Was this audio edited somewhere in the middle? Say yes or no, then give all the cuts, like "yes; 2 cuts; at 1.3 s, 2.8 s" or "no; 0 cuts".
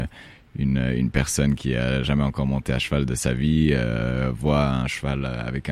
no; 0 cuts